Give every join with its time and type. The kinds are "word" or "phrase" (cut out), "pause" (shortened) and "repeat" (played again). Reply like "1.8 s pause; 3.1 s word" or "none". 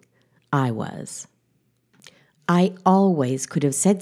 none